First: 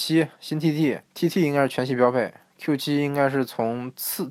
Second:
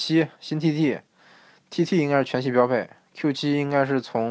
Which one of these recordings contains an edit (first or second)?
first